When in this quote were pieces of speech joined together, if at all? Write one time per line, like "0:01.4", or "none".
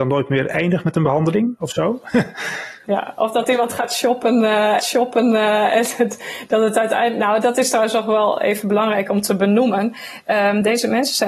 0:02.8
0:04.8